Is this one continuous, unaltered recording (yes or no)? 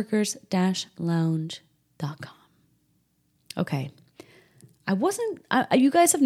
yes